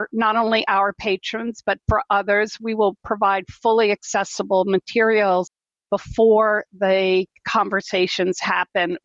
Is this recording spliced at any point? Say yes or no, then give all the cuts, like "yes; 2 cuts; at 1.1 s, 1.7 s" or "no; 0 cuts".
no; 0 cuts